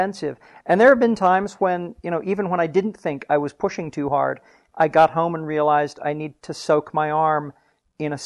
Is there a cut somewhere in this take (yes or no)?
no